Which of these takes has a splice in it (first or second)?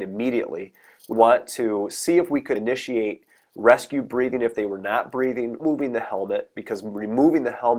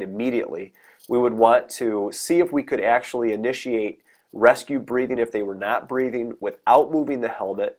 first